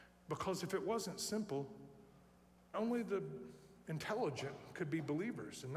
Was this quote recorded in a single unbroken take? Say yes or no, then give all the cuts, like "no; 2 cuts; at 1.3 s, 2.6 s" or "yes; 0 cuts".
no; 1 cut; at 2.7 s